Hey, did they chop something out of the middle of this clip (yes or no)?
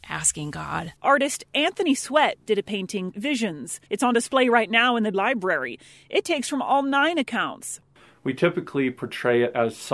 yes